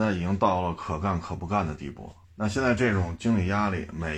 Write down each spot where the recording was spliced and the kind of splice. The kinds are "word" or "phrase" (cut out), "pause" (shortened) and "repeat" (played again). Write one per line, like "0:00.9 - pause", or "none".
0:02.2 - pause